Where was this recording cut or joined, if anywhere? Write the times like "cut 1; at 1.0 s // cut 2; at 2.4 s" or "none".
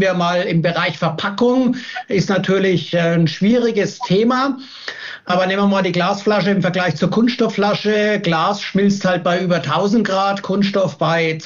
none